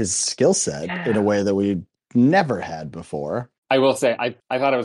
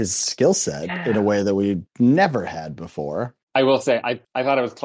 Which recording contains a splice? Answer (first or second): second